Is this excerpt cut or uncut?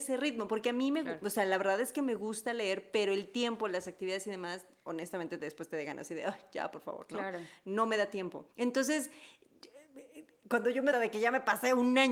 cut